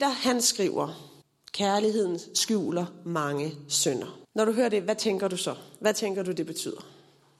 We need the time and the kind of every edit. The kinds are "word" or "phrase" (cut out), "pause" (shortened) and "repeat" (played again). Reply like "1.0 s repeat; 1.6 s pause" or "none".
1.2 s pause; 4.2 s pause